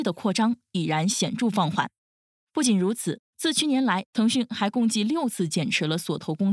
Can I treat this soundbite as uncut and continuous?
yes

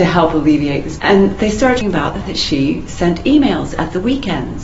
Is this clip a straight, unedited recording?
no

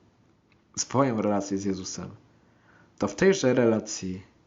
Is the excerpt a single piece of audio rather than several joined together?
yes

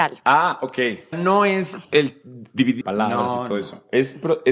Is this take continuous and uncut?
no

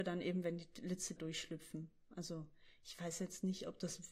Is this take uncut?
no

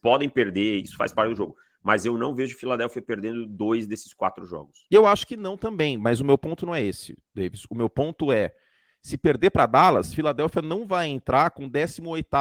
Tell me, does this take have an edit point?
no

